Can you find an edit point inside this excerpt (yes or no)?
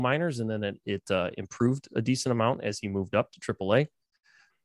no